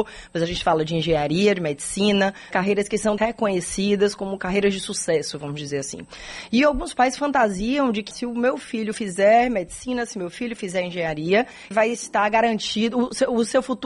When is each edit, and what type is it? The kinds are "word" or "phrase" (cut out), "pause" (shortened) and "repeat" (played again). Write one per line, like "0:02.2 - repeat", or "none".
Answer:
0:02.5 - word
0:03.2 - word
0:08.1 - word
0:11.7 - word